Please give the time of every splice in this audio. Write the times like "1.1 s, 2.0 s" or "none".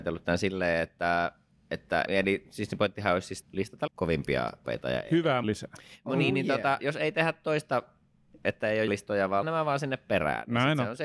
2.1 s, 3.4 s, 3.9 s, 4.6 s, 5.4 s, 6.8 s, 8.9 s, 9.4 s